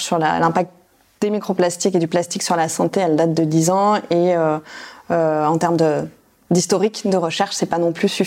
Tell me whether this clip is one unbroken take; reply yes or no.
yes